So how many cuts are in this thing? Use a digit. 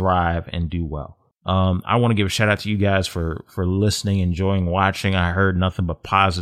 1